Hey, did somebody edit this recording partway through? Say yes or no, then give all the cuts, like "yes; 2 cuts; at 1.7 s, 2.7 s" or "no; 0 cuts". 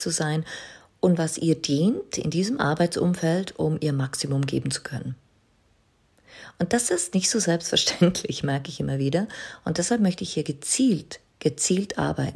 no; 0 cuts